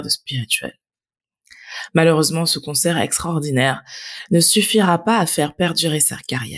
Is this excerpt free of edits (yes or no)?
yes